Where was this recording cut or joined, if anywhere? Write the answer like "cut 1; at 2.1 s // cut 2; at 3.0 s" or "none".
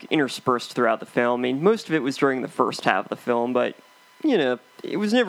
none